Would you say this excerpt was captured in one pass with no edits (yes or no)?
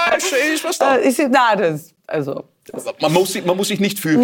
yes